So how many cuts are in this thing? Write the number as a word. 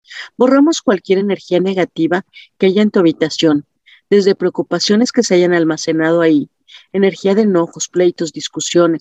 zero